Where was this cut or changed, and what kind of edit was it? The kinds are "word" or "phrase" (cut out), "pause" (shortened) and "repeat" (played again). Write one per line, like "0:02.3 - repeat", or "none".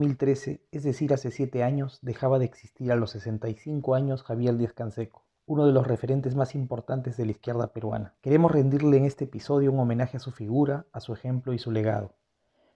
0:05.4 - pause
0:08.2 - pause